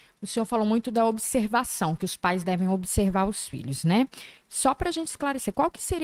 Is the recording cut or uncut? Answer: uncut